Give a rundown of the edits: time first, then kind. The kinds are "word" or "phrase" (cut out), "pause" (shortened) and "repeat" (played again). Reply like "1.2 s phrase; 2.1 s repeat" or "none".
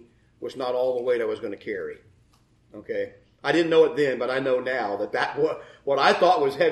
none